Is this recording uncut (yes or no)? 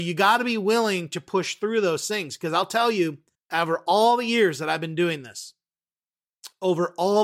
no